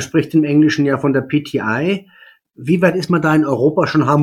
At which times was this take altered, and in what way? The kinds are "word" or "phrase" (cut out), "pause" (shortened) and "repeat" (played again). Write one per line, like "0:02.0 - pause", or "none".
none